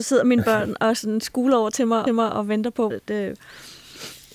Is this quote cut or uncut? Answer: cut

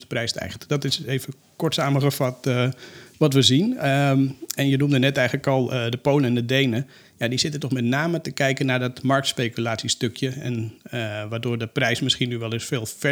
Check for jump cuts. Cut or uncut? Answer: uncut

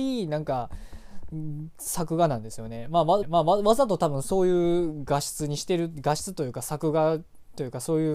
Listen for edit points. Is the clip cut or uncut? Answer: cut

